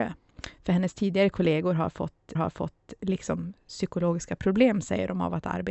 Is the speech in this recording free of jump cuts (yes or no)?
no